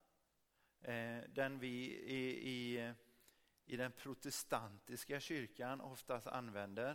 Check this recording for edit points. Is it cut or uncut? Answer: uncut